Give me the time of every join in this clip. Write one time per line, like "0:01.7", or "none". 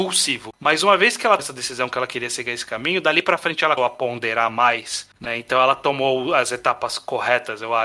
0:01.4
0:03.8